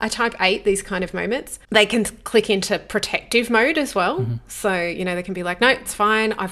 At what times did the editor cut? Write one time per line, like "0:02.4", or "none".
0:01.6